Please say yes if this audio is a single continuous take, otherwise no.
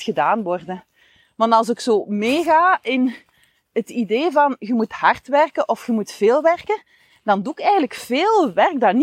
yes